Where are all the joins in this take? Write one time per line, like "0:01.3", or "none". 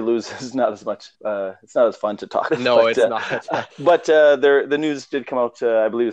0:01.1
0:02.5
0:03.7